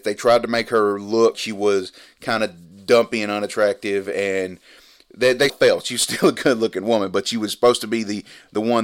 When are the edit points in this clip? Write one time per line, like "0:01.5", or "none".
0:01.3
0:05.5